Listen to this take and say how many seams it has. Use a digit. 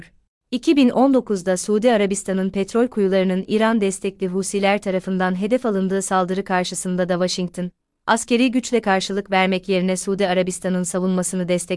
0